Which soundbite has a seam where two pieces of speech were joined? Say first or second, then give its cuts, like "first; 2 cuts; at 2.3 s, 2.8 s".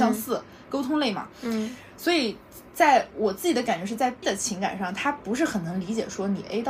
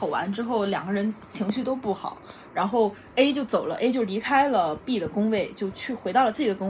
first; 1 cut; at 4.2 s